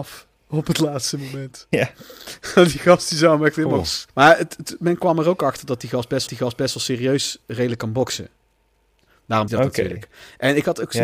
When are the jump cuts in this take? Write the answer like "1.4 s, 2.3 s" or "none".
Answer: 4.1 s, 6.3 s, 7.4 s, 9.5 s